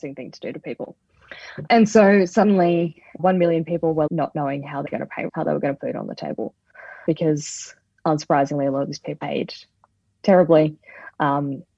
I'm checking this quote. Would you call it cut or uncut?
cut